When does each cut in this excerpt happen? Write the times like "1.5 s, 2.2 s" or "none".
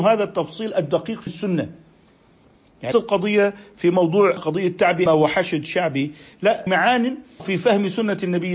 1.3 s, 2.9 s, 4.4 s, 5.1 s, 6.7 s, 7.4 s